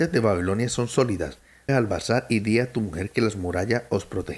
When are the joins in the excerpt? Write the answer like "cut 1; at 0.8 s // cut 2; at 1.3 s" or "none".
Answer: cut 1; at 1.7 s